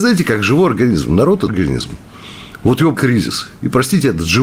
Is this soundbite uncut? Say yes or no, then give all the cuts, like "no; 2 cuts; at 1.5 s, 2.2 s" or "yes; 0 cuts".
no; 2 cuts; at 1.5 s, 2.9 s